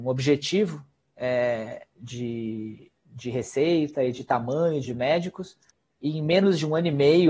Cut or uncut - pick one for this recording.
cut